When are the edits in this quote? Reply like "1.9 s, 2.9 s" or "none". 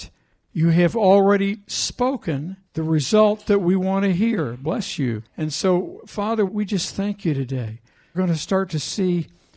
2.7 s, 5.3 s, 6.5 s, 8.1 s